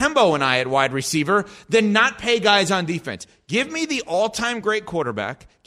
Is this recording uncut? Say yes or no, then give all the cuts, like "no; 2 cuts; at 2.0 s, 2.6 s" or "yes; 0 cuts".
yes; 0 cuts